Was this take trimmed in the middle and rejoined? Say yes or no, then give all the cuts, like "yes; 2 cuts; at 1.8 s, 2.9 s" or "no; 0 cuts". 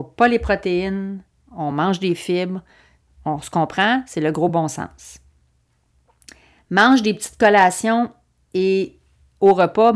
no; 0 cuts